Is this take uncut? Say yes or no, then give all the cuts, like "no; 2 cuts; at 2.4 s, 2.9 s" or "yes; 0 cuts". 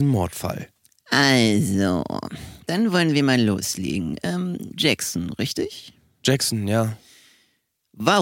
yes; 0 cuts